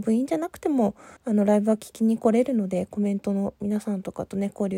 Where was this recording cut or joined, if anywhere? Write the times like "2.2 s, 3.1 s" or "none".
1.2 s